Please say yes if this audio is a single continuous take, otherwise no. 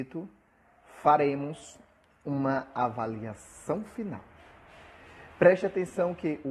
yes